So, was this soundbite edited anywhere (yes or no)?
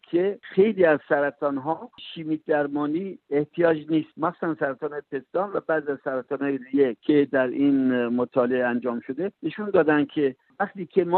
no